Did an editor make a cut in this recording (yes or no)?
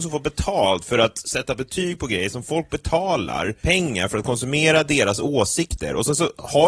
no